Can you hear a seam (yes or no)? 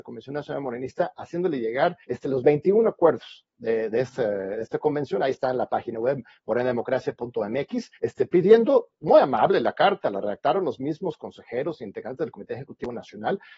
yes